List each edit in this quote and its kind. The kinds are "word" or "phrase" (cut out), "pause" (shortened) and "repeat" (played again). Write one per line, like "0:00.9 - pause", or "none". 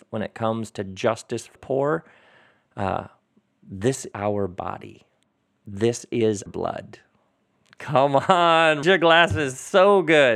0:01.6 - word
0:04.1 - word
0:06.5 - word
0:08.8 - word